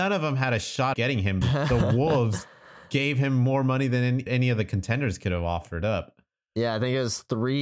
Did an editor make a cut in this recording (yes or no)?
yes